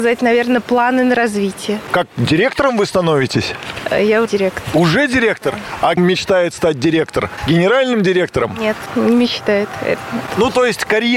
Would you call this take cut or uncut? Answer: cut